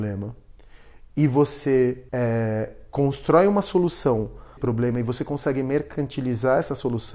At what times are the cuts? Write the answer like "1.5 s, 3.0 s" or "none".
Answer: 2.1 s, 4.6 s

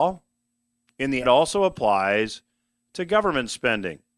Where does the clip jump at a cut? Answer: 1.2 s

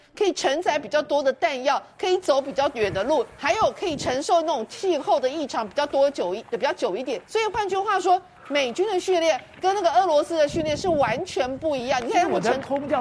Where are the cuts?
7.2 s

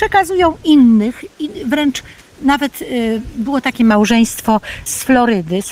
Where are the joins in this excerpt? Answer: none

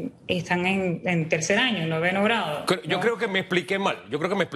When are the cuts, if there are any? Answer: none

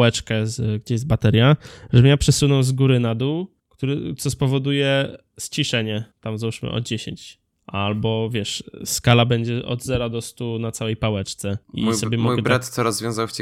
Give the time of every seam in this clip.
3.6 s, 6.1 s, 7.6 s, 11.6 s

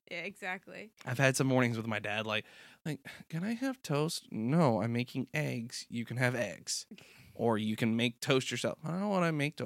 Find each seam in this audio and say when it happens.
0.9 s

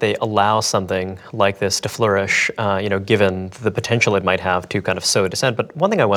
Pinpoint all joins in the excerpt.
3.6 s

